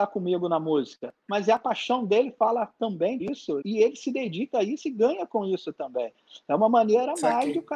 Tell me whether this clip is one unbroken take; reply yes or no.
no